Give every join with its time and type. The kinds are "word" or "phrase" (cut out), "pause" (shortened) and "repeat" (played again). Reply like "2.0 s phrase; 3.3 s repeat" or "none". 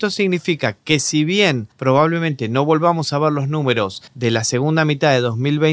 1.7 s pause; 4.1 s pause